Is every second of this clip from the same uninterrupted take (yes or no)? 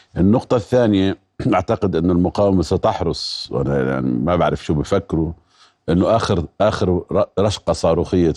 yes